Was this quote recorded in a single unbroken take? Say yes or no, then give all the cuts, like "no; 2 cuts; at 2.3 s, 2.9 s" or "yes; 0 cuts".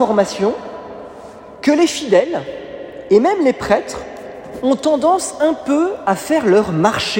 yes; 0 cuts